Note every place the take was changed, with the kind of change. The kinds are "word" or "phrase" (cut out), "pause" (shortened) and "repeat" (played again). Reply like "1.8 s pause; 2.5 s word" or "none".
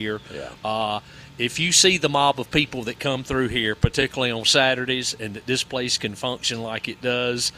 none